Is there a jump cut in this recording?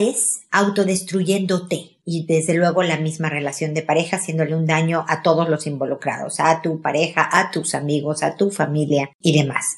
no; 0 cuts

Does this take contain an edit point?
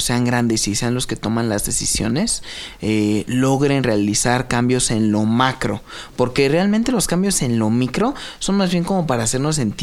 no; 0 cuts

